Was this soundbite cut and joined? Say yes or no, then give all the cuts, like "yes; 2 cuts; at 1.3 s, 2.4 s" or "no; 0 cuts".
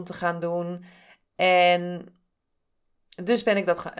no; 0 cuts